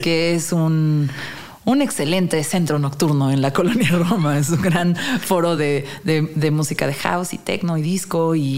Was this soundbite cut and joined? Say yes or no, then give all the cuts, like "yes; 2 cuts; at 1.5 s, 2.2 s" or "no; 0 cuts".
no; 0 cuts